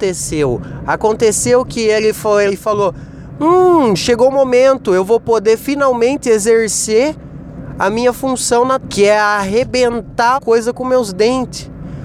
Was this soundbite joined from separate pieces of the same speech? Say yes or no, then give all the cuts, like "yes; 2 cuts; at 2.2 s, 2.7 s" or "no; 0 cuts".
yes; 3 cuts; at 2.5 s, 8.8 s, 10.4 s